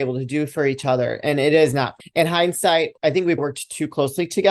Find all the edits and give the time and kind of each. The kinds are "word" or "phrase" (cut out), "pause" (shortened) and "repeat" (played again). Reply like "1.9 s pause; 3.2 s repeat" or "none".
2.0 s word; 3.0 s pause; 3.4 s word